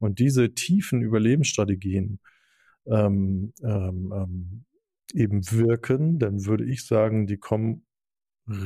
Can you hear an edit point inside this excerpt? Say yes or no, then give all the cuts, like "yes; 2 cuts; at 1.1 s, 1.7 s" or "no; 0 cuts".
no; 0 cuts